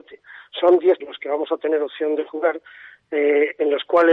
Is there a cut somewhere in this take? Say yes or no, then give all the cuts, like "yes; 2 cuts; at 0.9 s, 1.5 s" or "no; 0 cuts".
yes; 1 cut; at 1.0 s